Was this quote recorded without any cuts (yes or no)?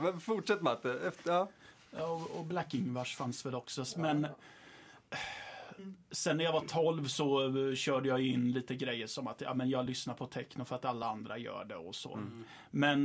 yes